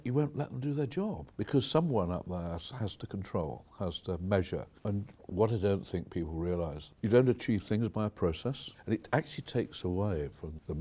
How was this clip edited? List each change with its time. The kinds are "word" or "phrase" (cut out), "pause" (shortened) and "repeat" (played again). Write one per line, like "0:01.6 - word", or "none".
none